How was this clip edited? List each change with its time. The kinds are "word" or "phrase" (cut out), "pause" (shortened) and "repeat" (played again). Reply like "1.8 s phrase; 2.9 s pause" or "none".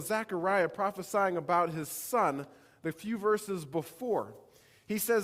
none